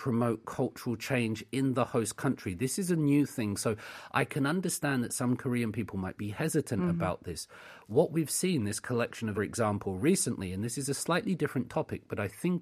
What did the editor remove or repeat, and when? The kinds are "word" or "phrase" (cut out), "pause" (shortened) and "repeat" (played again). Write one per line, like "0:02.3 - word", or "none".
0:09.3 - phrase